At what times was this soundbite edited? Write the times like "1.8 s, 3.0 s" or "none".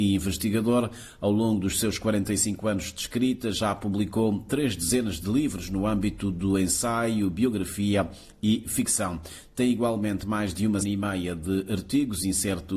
10.8 s